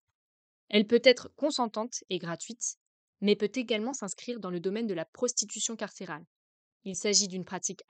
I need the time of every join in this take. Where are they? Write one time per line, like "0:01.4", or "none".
none